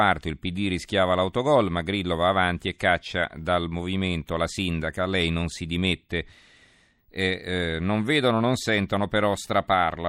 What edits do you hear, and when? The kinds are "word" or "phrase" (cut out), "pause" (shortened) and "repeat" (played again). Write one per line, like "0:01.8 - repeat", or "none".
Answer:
none

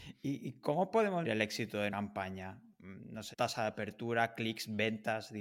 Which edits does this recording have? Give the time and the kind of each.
0:01.2 - word
0:01.9 - word
0:03.3 - word

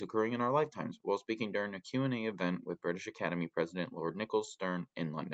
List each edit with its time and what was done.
none

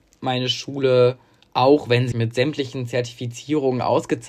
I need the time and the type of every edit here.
0:01.4 - pause
0:02.1 - word

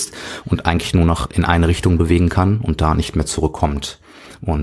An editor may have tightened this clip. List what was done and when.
none

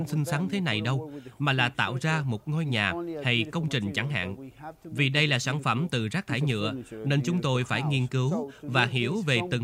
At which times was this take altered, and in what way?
none

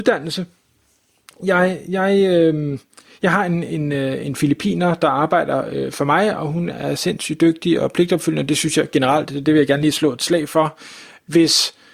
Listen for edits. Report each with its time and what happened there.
0:06.7 - word

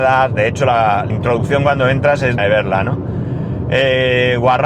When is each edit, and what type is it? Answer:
0:01.1 - word
0:02.4 - word

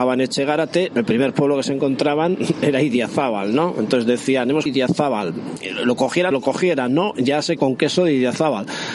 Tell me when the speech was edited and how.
0:04.7 - phrase
0:06.3 - word
0:07.6 - word

